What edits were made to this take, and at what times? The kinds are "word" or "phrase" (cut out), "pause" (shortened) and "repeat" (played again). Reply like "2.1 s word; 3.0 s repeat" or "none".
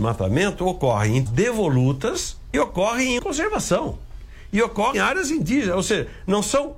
1.3 s word; 2.5 s phrase; 3.2 s phrase; 4.9 s word